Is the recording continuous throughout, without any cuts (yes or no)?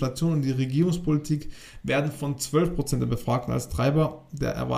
yes